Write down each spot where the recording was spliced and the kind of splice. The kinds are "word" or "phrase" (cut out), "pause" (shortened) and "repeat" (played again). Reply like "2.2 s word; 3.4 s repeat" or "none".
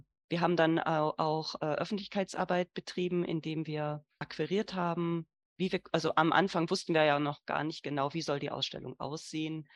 none